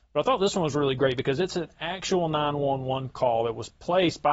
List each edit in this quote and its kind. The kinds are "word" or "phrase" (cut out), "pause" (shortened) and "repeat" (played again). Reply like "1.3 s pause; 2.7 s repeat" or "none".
none

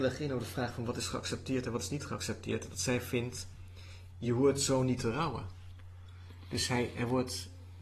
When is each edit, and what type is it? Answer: none

